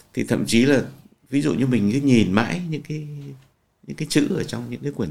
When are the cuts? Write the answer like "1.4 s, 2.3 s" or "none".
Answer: none

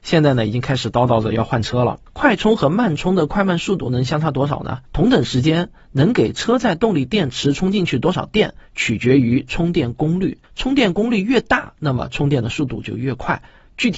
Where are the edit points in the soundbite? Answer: 2.1 s, 4.8 s, 10.4 s

